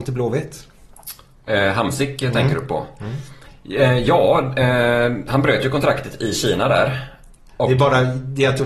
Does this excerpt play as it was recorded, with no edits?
yes; 0 cuts

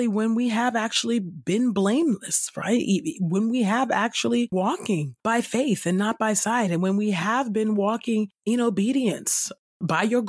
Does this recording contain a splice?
yes; 1 cut; at 4.5 s

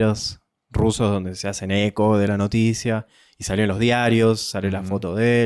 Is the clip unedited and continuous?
yes; 0 cuts

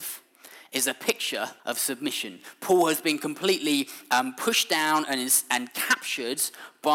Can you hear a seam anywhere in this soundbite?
yes; 1 cut; at 1.6 s

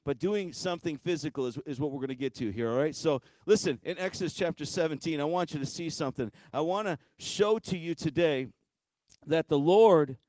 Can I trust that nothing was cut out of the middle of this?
yes; 0 cuts

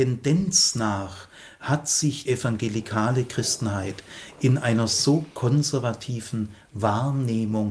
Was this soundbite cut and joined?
yes; 1 cut; at 2.2 s

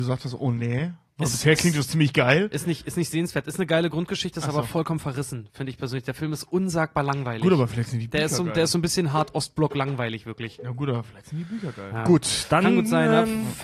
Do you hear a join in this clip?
no; 0 cuts

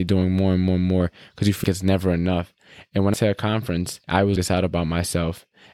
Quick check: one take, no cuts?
no; 4 cuts; at 1.6 s, 3.1 s, 4.0 s, 4.4 s

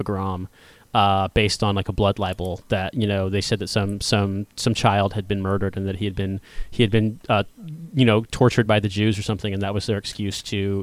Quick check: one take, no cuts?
yes; 0 cuts

